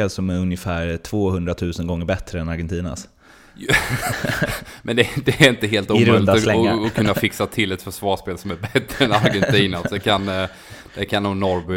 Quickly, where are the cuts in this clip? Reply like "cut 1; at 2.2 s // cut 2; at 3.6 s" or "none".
none